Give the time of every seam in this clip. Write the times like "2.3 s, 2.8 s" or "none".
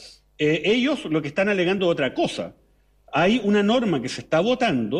none